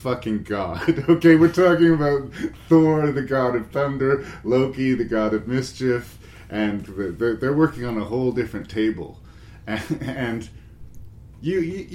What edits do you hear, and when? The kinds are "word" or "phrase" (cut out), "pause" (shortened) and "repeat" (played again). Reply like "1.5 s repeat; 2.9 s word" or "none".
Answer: 6.9 s word